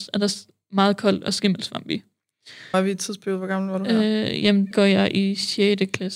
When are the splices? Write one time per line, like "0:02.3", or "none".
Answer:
0:02.7
0:04.7

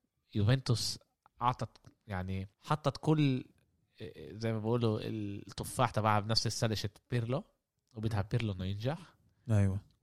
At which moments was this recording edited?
0:01.3
0:02.5

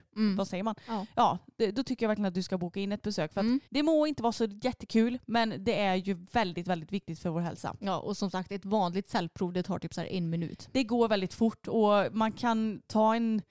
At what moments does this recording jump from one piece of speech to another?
0:03.7

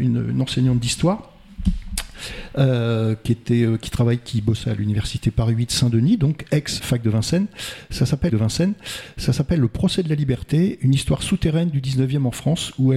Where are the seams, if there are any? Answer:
0:06.8
0:08.3

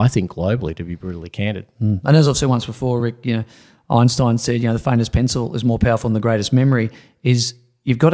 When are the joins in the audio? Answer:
none

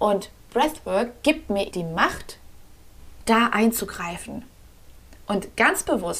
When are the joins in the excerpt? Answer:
0:01.7

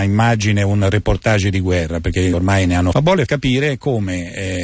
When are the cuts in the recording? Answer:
0:02.3
0:02.9
0:03.3

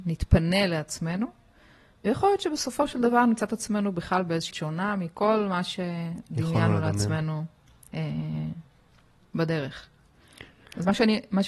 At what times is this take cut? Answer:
0:04.5

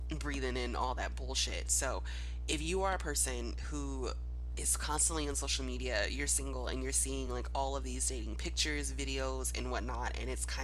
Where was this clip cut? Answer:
none

